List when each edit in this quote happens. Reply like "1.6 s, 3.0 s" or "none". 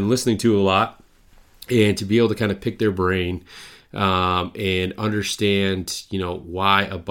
none